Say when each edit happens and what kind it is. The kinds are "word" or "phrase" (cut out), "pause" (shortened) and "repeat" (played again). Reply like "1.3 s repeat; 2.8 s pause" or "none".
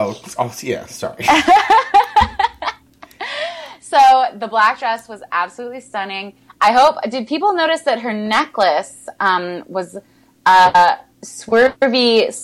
none